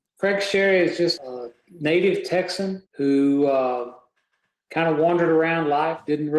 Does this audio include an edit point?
yes; 2 cuts; at 1.2 s, 2.9 s

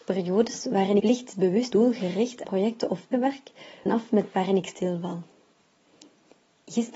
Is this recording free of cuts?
no; 6 cuts; at 1.0 s, 1.7 s, 2.4 s, 3.1 s, 3.9 s, 4.3 s

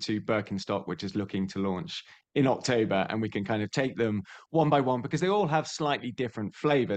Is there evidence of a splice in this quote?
no; 0 cuts

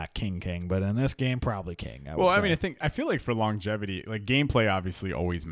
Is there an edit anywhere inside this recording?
no; 0 cuts

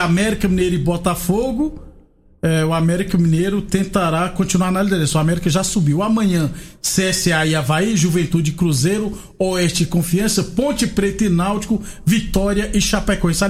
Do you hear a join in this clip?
no; 0 cuts

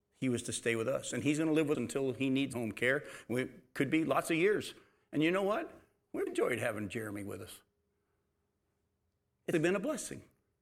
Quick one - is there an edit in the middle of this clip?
yes; 4 cuts; at 1.7 s, 2.5 s, 6.3 s, 9.5 s

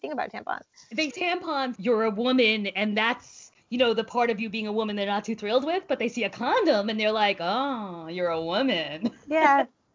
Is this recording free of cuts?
no; 3 cuts; at 1.1 s, 1.7 s, 3.6 s

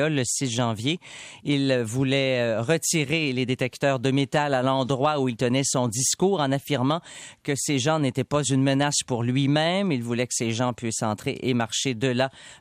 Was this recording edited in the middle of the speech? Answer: no; 0 cuts

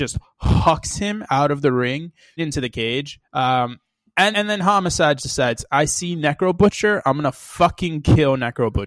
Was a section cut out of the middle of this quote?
yes; 4 cuts; at 2.4 s, 3.2 s, 4.3 s, 5.2 s

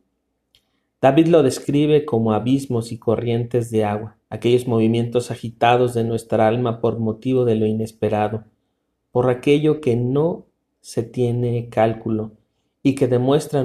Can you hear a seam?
yes; 1 cut; at 4.2 s

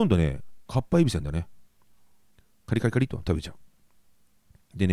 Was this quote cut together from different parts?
no; 0 cuts

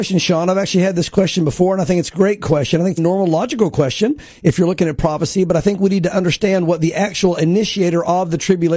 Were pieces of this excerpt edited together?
yes; 1 cut; at 3.0 s

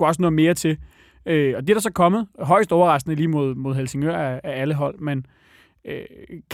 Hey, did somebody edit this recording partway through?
no; 0 cuts

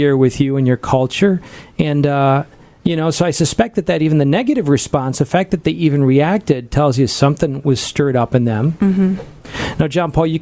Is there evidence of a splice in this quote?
no; 0 cuts

